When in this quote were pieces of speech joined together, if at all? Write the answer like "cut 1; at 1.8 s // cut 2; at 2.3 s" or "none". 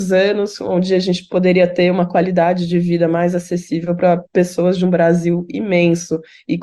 cut 1; at 4.3 s